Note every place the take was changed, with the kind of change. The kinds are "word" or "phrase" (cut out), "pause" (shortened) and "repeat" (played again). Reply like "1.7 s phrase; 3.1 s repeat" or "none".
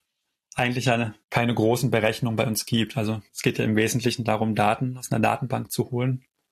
1.2 s pause; 3.3 s pause

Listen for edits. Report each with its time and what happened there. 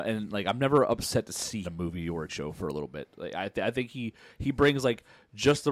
1.6 s phrase; 2.3 s word

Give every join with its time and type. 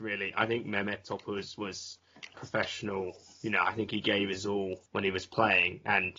2.3 s word; 4.9 s pause

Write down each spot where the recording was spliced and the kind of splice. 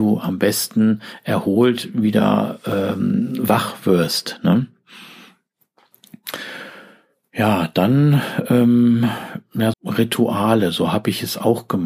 9.7 s word

